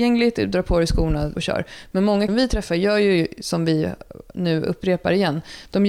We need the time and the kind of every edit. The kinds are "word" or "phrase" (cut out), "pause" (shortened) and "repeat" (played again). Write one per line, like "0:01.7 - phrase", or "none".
0:01.4 - phrase
0:02.3 - phrase

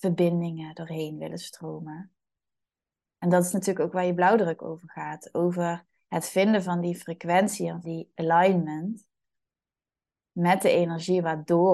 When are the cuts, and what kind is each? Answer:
0:07.8 - word

